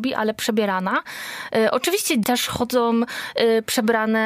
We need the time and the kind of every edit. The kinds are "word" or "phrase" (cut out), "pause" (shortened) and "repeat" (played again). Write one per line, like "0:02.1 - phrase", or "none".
0:02.2 - word